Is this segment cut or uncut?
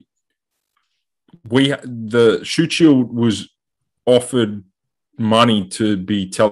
uncut